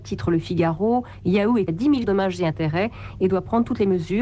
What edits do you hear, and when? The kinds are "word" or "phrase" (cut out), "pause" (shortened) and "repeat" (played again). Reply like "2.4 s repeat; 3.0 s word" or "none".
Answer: 1.7 s word; 2.0 s word